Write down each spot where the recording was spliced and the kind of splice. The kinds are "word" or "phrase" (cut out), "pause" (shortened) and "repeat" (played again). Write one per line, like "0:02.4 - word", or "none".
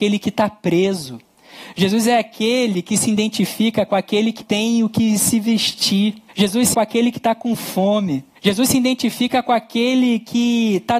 0:04.4 - word
0:06.3 - pause
0:06.7 - word
0:08.3 - pause